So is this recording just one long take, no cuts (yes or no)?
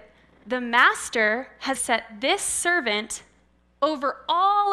no